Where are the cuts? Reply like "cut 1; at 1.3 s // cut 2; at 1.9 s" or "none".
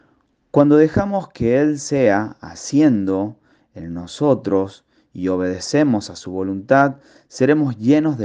none